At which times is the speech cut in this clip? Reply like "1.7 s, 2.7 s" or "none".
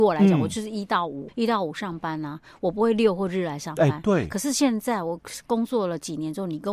1.3 s

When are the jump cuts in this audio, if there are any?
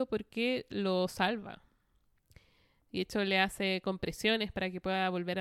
none

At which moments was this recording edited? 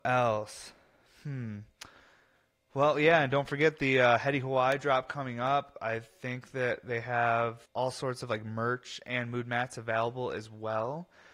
7.7 s

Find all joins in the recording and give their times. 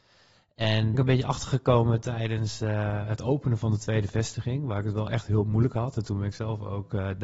0.9 s

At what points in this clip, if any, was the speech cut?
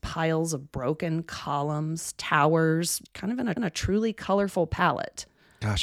3.1 s, 3.6 s

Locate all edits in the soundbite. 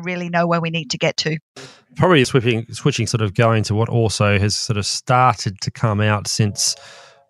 2.2 s, 3.1 s

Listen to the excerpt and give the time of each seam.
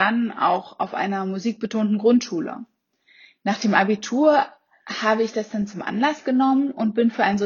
none

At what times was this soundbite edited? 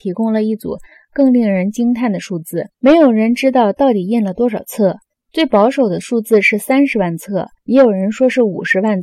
2.7 s, 5.1 s, 7.6 s

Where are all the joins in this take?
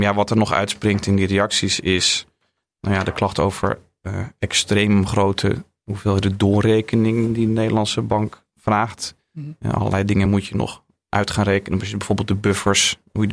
none

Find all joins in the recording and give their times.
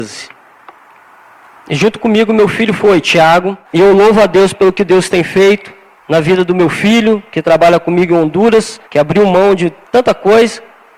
3.6 s, 6.0 s, 8.8 s, 9.8 s

